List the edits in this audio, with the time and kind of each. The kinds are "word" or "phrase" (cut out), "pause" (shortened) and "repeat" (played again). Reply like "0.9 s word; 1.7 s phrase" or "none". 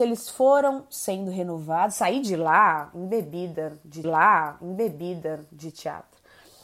4.0 s repeat